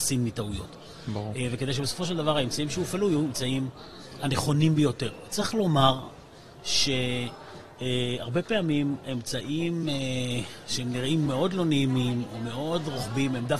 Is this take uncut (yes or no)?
yes